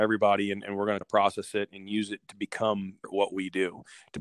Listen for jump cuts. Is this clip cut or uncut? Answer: cut